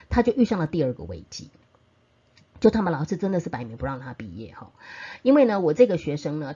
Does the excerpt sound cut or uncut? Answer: uncut